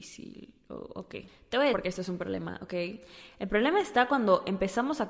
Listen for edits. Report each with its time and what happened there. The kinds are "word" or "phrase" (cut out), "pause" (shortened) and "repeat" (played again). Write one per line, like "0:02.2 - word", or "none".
0:01.7 - word